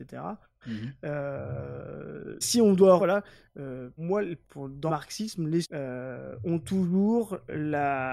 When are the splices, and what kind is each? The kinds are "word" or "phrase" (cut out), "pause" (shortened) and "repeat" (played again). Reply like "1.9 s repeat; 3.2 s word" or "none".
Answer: 2.4 s word; 3.0 s word; 4.0 s word; 4.4 s word; 4.9 s word; 5.6 s word

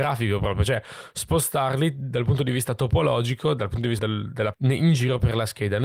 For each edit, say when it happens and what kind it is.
4.0 s word; 4.5 s word

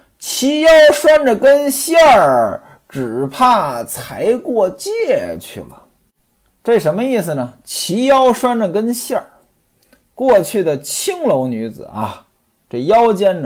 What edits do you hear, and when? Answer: none

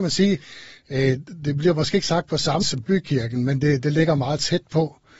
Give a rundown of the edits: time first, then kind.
2.6 s phrase

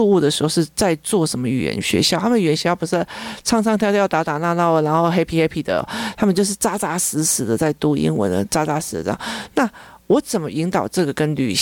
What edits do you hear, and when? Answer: none

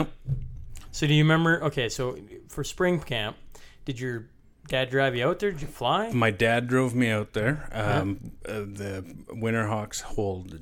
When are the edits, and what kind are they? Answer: none

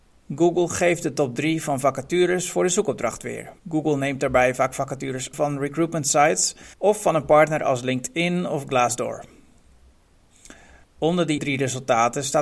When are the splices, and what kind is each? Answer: 3.6 s pause; 5.3 s word; 6.7 s pause; 10.8 s pause; 11.4 s word

